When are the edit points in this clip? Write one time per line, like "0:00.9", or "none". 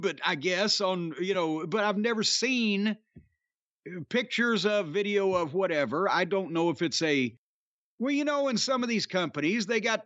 none